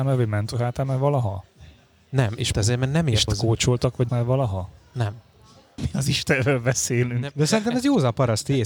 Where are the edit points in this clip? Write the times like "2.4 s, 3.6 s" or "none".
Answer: 2.5 s, 3.3 s, 4.1 s, 5.8 s